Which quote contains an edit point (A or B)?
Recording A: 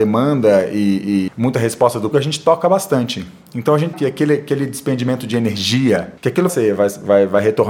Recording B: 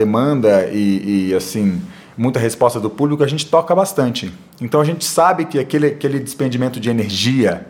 A